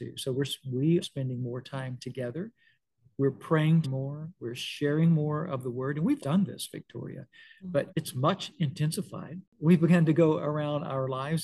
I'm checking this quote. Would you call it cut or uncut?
cut